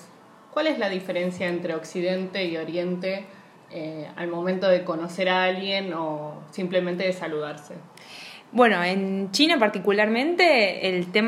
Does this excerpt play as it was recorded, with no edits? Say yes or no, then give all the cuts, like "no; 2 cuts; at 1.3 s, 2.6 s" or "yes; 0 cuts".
yes; 0 cuts